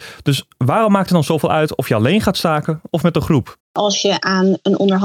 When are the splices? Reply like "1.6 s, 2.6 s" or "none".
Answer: 3.6 s